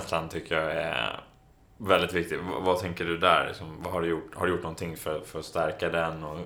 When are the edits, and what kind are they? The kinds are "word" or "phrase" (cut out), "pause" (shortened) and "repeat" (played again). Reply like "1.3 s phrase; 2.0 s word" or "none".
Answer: none